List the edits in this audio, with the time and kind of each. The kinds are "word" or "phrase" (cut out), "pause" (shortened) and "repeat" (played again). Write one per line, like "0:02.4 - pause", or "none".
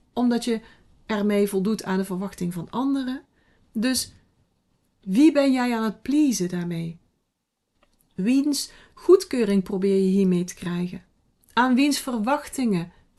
none